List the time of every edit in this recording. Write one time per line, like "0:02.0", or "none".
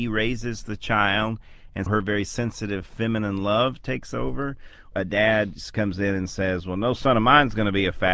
0:01.9
0:04.9